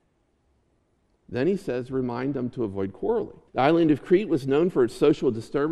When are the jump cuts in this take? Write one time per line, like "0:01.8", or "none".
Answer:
0:03.5